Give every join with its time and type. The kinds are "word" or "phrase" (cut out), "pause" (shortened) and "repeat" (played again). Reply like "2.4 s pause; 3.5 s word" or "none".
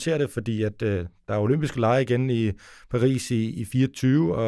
none